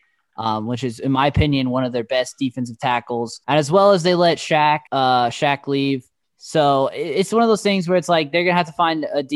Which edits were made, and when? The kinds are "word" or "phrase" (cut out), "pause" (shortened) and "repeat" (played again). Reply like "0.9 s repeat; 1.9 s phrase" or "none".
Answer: 3.4 s pause; 4.9 s pause; 6.2 s pause